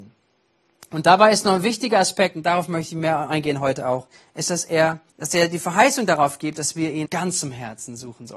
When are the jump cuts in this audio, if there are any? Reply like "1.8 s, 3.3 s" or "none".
4.1 s, 5.1 s, 7.0 s